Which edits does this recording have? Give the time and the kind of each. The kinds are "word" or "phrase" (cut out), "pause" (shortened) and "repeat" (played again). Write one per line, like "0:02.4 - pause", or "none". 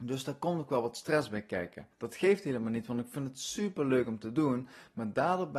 0:01.9 - pause